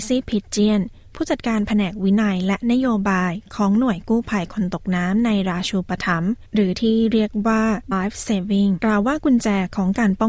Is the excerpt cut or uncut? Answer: cut